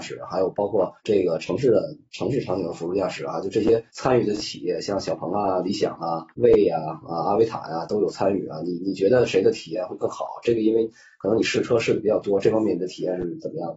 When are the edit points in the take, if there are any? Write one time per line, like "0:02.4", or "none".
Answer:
0:01.0
0:03.9
0:06.3

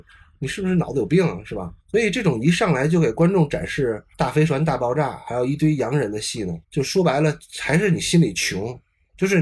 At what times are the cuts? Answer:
0:01.8
0:04.1
0:06.6

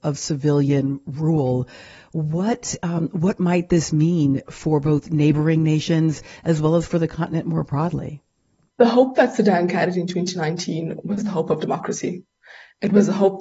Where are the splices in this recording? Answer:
none

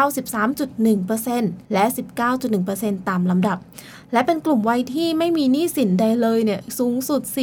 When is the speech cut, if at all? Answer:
0:01.6

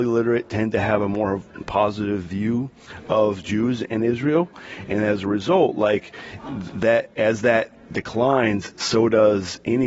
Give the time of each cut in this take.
none

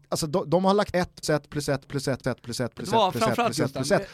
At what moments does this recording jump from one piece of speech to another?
0:00.9
0:01.2
0:02.2

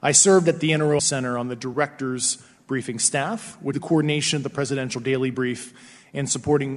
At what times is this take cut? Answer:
0:01.0
0:03.7

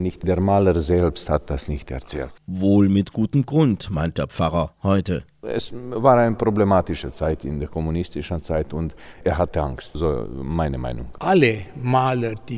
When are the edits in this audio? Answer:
0:02.4

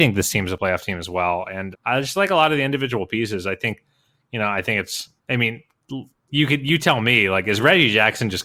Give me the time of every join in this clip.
0:01.7
0:05.2

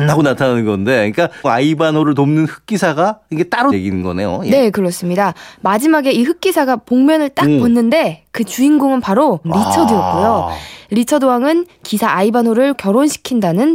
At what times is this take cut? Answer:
0:01.4
0:03.7
0:09.4
0:12.7

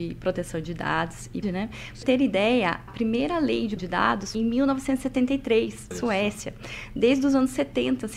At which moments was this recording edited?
0:01.4
0:02.0
0:02.9
0:03.8
0:04.3
0:05.9

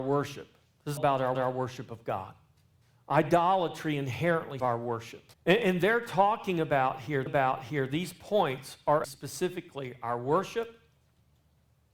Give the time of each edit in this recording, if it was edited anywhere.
0:01.0
0:01.3
0:02.8
0:04.6
0:05.3
0:07.3
0:09.0

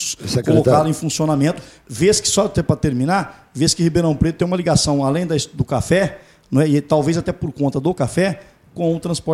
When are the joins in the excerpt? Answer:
none

